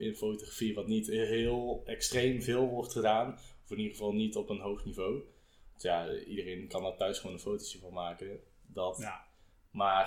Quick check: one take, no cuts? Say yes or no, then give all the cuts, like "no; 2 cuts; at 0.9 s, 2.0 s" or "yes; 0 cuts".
yes; 0 cuts